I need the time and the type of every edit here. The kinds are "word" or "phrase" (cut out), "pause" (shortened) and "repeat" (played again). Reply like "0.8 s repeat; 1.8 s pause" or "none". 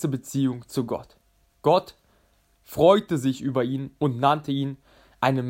none